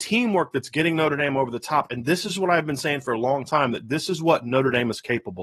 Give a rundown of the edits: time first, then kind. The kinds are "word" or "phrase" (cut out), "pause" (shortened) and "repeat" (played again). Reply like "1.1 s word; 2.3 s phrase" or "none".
none